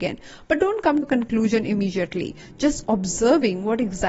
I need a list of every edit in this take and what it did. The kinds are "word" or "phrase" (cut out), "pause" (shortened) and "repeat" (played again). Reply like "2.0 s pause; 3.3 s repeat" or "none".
1.0 s word; 2.8 s word